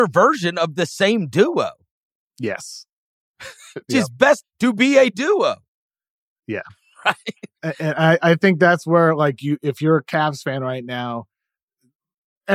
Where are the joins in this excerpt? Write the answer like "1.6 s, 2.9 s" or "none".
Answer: 3.9 s, 4.4 s